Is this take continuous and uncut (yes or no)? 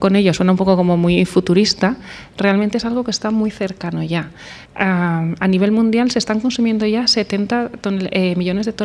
no